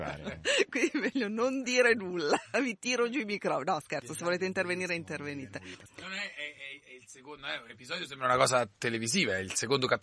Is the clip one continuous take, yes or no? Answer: yes